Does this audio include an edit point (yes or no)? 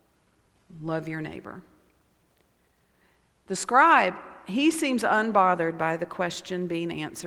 no